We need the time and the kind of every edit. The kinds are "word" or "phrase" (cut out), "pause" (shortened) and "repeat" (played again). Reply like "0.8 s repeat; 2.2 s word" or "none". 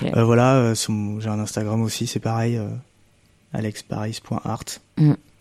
none